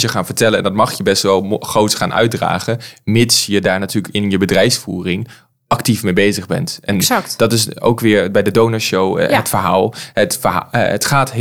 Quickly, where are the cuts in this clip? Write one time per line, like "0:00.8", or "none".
none